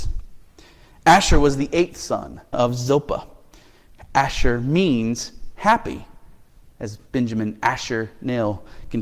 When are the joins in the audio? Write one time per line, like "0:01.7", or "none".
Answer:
0:02.5

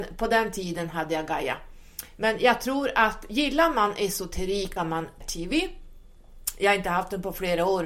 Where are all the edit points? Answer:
0:04.8
0:05.2

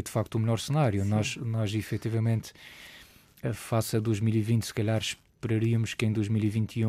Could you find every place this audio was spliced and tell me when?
none

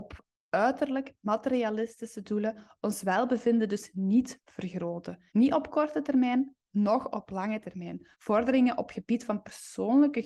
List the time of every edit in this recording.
0:05.3
0:08.1

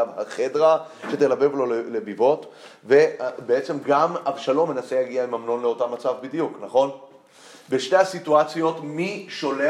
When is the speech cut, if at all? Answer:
none

